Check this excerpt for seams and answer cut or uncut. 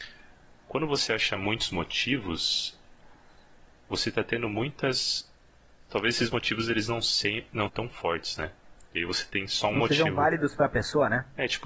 cut